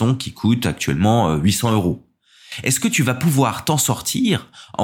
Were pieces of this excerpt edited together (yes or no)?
no